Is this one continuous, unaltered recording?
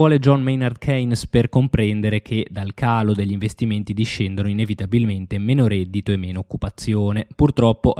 yes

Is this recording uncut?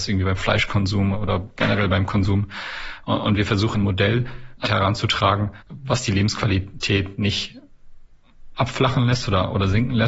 no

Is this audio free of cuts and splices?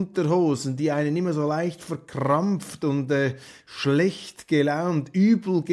yes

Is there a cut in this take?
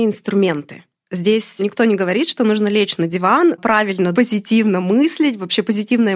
yes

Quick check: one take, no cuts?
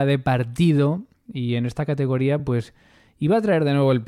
yes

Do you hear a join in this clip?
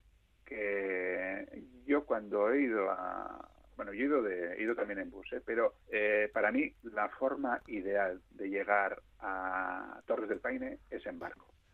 yes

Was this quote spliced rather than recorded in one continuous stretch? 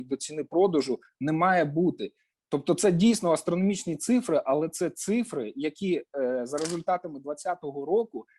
no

